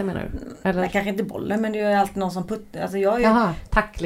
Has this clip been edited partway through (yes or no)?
no